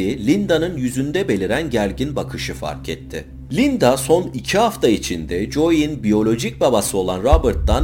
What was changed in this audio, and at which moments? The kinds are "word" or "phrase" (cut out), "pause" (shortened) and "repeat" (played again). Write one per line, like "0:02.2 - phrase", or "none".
none